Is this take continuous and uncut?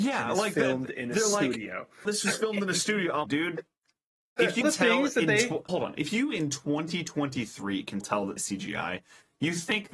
no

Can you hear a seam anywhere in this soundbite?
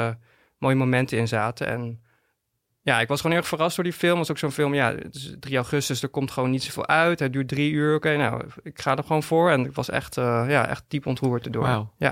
no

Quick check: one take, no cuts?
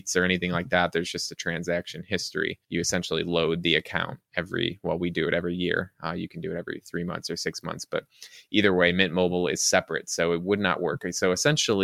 no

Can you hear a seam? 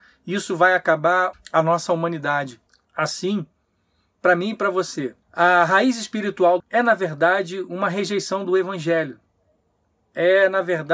yes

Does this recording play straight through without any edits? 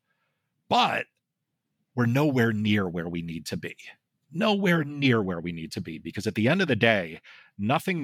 yes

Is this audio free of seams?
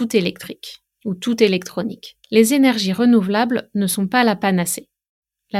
no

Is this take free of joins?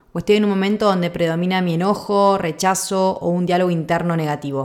yes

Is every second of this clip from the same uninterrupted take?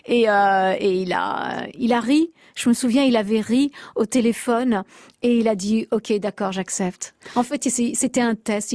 yes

